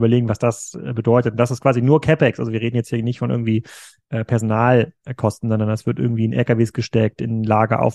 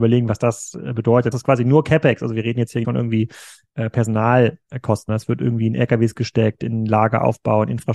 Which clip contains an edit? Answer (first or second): second